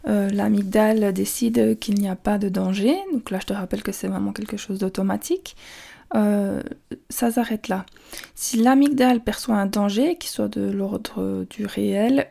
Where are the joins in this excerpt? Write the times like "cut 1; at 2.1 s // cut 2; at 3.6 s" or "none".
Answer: none